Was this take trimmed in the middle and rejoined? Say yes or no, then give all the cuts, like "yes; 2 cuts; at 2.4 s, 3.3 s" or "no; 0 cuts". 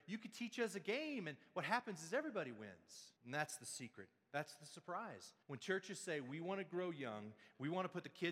yes; 2 cuts; at 3.2 s, 5.4 s